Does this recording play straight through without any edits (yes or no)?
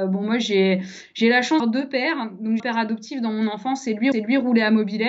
no